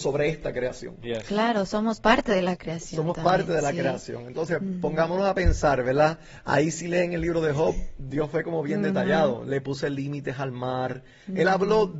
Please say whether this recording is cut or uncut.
uncut